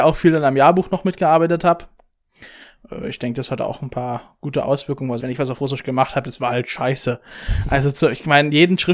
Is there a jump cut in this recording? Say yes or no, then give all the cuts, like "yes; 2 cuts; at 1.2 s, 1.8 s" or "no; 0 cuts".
yes; 1 cut; at 5.2 s